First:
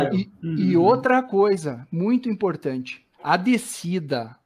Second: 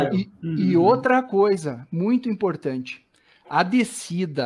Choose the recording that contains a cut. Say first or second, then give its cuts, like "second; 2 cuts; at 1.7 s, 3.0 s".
first; 1 cut; at 3.1 s